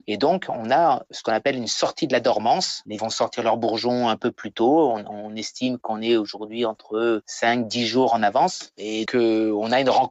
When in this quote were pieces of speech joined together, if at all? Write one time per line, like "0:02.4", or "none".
0:03.0
0:09.1